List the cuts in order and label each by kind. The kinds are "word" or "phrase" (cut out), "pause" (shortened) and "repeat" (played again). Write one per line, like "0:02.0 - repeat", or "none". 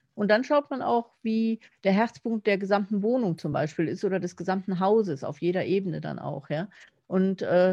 none